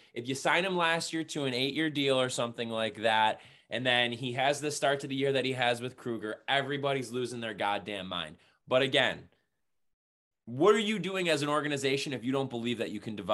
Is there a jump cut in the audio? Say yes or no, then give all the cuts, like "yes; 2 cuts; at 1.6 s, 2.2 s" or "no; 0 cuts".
no; 0 cuts